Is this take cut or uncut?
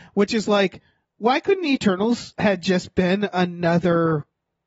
uncut